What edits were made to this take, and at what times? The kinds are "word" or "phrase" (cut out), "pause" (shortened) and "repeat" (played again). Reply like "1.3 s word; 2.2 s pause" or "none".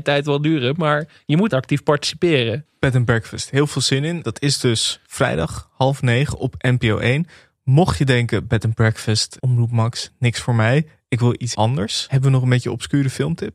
1.5 s word; 9.4 s word; 11.5 s word